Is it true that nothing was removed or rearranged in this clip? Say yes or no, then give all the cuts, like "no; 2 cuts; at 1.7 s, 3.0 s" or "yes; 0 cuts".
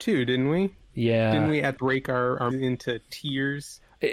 no; 2 cuts; at 1.8 s, 2.5 s